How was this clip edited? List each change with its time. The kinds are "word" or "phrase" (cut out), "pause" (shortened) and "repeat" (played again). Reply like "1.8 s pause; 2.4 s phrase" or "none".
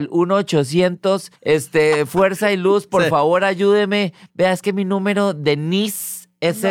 1.4 s pause